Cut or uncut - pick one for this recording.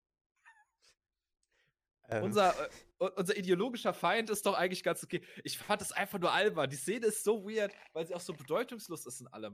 uncut